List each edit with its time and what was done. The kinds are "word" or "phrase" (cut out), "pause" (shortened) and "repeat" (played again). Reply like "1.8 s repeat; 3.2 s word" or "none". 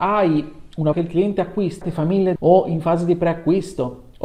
0.9 s word; 1.8 s word; 2.4 s word